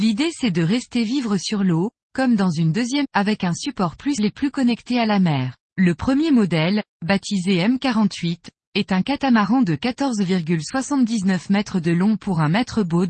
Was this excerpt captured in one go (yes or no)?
no